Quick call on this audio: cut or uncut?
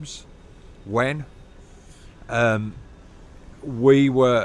uncut